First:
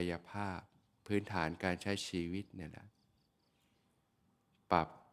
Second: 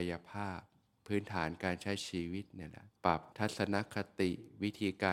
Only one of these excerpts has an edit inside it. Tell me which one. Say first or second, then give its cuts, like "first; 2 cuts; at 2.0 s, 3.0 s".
second; 2 cuts; at 3.0 s, 3.3 s